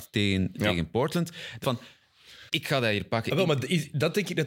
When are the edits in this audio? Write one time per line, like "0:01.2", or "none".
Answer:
0:01.6
0:02.5

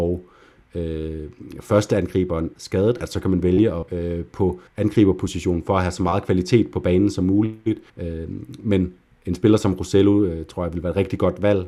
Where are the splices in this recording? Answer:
0:02.5
0:03.9
0:04.7
0:07.9

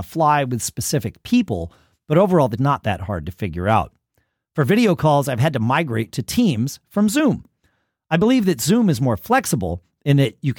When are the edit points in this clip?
0:02.6

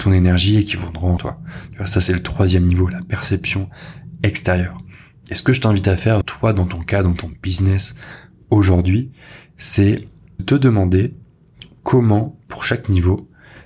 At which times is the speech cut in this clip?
0:01.2
0:06.2
0:10.4

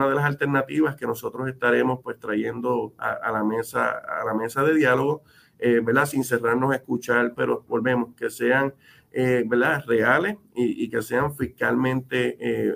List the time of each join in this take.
0:07.3

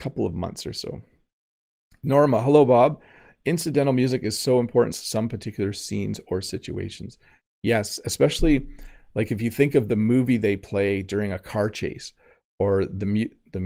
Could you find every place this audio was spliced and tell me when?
0:04.9

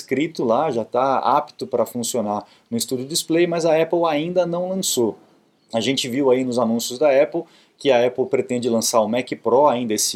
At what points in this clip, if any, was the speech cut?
none

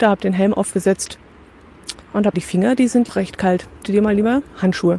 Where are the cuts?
0:02.0
0:02.3
0:03.1
0:03.8

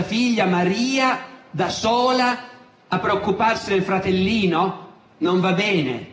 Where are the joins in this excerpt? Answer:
none

